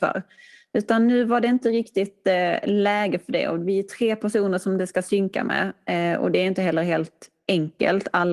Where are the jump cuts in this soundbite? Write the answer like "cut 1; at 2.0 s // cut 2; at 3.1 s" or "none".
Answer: none